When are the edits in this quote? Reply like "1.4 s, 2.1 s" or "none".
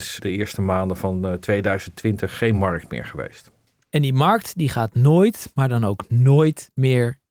none